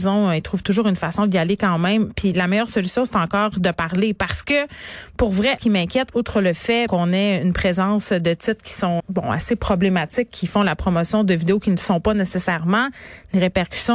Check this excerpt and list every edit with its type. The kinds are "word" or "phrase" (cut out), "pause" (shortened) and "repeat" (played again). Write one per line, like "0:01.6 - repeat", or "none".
0:05.6 - phrase
0:06.9 - word
0:09.0 - word